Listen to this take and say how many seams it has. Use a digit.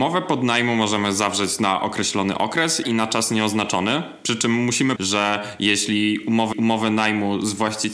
3